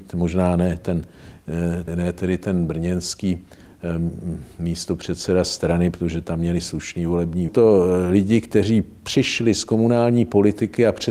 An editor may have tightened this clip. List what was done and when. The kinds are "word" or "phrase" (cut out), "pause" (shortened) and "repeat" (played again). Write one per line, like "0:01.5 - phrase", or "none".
0:01.9 - word
0:07.5 - phrase